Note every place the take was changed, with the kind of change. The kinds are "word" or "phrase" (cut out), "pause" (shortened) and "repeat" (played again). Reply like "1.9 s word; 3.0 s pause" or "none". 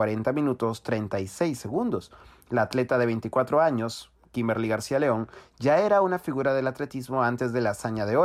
none